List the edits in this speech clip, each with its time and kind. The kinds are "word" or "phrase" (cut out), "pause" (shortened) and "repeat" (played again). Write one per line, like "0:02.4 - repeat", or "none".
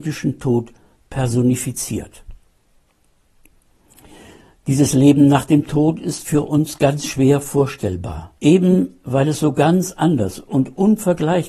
0:08.4 - pause